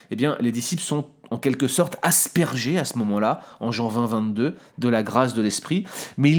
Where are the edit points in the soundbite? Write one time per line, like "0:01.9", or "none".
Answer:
none

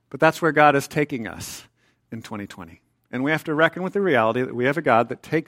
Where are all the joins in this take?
none

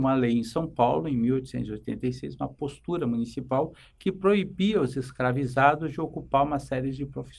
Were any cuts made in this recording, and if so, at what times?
none

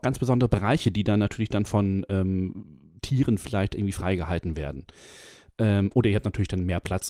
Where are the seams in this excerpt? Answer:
none

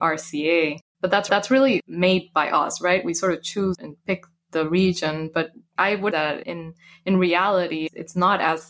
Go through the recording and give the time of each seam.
0:01.3
0:03.7
0:06.1

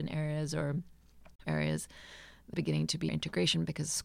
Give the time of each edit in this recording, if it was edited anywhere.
0:01.4
0:02.5
0:03.1

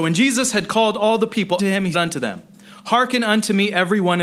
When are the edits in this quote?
0:01.6
0:01.9

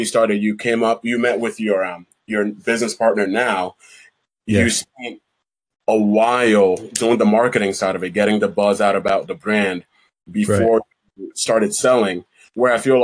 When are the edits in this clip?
none

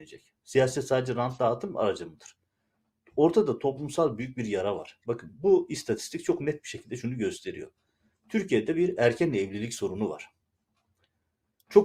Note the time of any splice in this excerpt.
none

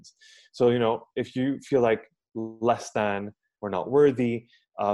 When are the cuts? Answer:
none

